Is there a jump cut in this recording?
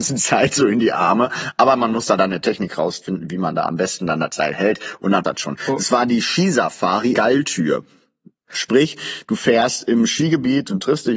yes; 2 cuts; at 5.2 s, 7.1 s

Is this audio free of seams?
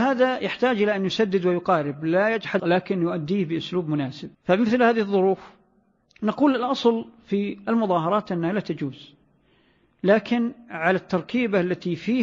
no; 2 cuts; at 2.6 s, 4.3 s

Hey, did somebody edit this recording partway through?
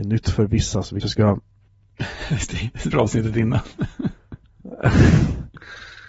yes; 2 cuts; at 1.0 s, 2.9 s

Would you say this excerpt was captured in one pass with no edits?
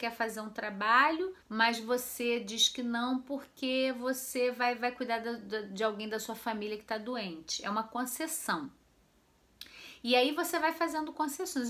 no; 1 cut; at 1.4 s

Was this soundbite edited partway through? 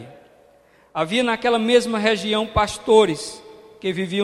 no; 0 cuts

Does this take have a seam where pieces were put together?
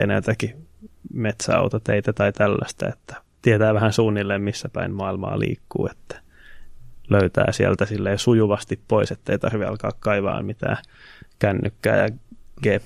no; 0 cuts

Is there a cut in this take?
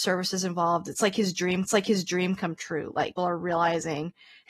yes; 2 cuts; at 1.7 s, 3.2 s

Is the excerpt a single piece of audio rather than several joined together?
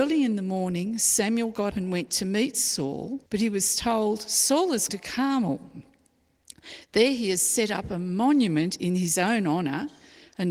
no; 3 cuts; at 1.7 s, 3.3 s, 4.9 s

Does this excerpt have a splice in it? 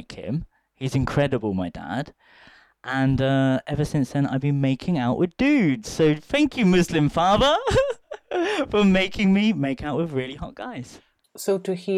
no; 0 cuts

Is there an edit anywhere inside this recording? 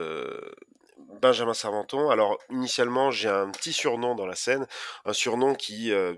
no; 0 cuts

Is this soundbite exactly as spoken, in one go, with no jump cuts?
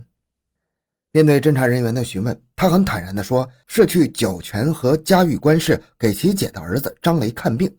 yes; 0 cuts

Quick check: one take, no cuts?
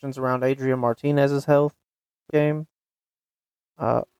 no; 1 cut; at 2.3 s

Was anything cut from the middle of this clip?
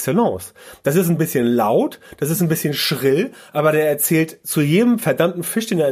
no; 0 cuts

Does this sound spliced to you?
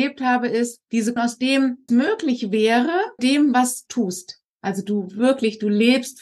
yes; 4 cuts; at 1.2 s, 1.9 s, 3.2 s, 3.9 s

